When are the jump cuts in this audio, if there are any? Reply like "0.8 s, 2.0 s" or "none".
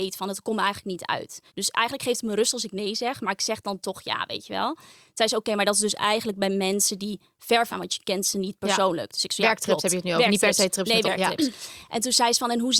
1.5 s, 7.7 s, 11.0 s